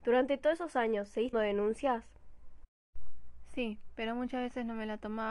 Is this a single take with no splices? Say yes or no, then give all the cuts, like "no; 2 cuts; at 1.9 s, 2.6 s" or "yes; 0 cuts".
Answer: no; 1 cut; at 1.3 s